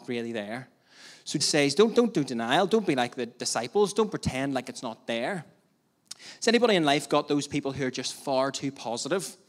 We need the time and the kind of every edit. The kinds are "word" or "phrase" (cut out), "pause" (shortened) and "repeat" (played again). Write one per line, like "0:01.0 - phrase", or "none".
0:01.4 - word